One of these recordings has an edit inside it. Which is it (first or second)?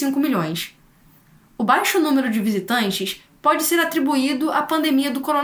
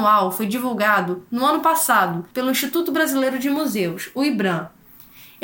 second